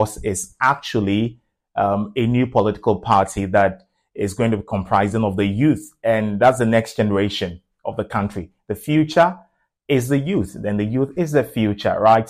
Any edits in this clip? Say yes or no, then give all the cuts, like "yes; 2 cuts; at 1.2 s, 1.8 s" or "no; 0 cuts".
no; 0 cuts